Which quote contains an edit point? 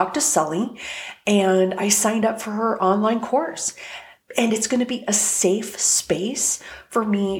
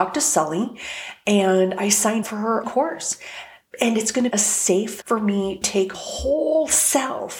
second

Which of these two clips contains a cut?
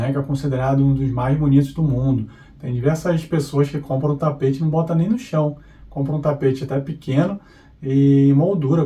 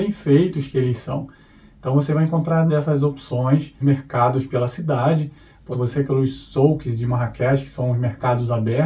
second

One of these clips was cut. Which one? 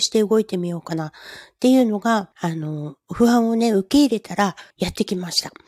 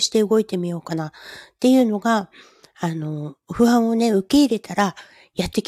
first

